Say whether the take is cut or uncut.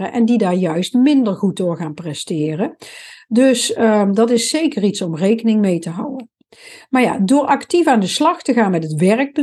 uncut